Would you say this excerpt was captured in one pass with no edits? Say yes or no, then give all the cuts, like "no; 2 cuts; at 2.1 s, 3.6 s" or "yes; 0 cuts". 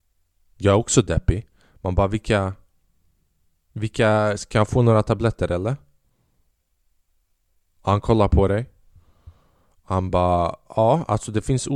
yes; 0 cuts